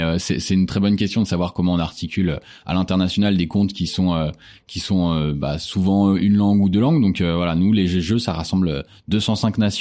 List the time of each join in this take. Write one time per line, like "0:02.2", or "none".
none